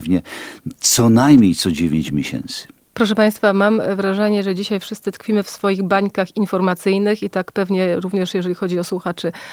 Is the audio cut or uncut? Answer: uncut